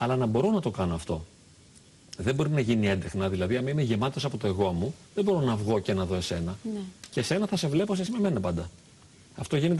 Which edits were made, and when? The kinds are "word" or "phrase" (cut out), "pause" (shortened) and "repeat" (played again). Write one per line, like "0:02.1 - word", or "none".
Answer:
0:05.0 - pause
0:08.1 - word